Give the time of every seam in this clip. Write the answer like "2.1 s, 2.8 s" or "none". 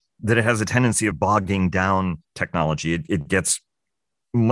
1.1 s, 2.2 s